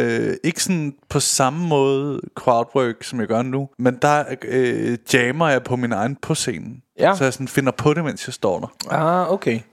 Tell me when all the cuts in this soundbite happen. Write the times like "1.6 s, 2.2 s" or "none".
3.7 s, 6.2 s